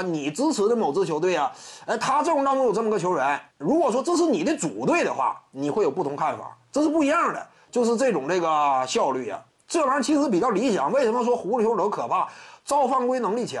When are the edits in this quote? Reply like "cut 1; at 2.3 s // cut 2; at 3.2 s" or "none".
cut 1; at 3.5 s // cut 2; at 9.5 s